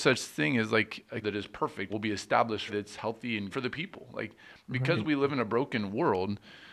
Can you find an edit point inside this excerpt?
yes; 4 cuts; at 1.2 s, 1.9 s, 2.7 s, 3.5 s

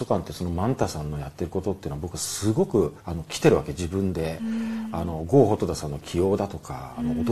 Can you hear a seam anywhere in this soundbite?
yes; 1 cut; at 3.0 s

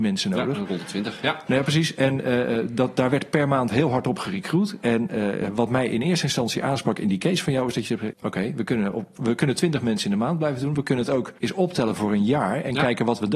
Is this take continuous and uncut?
no; 2 cuts; at 8.1 s, 11.4 s

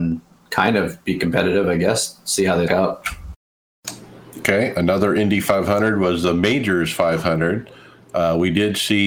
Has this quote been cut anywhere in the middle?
yes; 1 cut; at 2.7 s

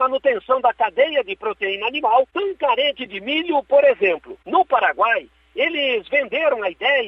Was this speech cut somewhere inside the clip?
no; 0 cuts

